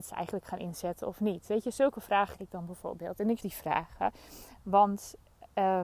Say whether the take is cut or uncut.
cut